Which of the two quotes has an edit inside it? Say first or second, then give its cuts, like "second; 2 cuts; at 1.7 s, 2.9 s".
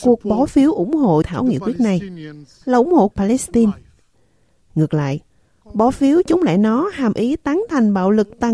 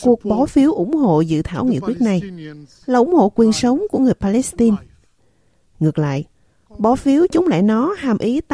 first; 2 cuts; at 1.2 s, 3.1 s